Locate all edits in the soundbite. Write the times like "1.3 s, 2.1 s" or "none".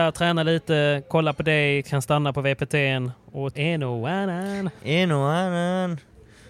1.8 s, 3.5 s